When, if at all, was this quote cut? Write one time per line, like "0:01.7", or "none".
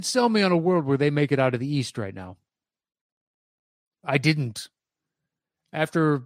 none